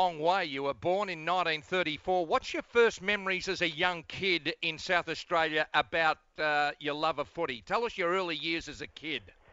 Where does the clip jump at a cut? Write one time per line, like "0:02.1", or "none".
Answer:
none